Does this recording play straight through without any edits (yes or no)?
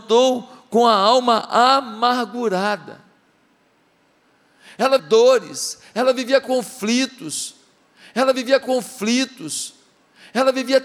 no